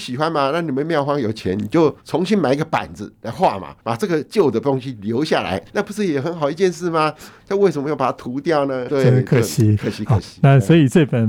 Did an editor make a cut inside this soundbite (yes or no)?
yes